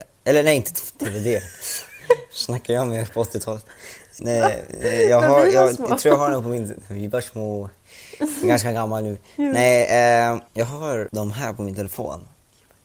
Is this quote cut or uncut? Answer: cut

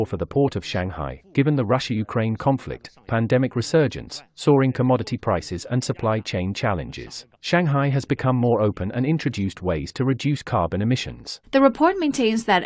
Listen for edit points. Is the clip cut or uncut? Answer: cut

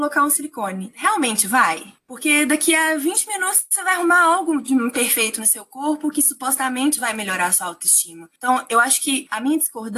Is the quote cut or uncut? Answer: cut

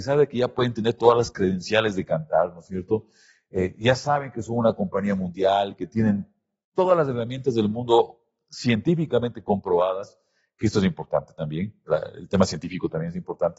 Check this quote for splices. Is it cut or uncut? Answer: uncut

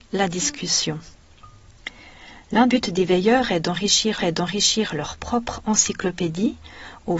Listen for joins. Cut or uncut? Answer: cut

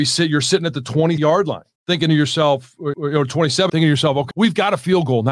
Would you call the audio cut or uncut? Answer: cut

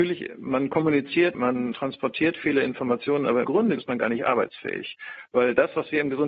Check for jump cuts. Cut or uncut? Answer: cut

